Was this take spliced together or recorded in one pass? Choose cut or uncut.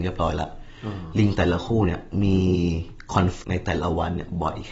cut